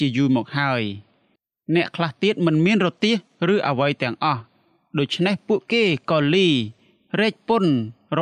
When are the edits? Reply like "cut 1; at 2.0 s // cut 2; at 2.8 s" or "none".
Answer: none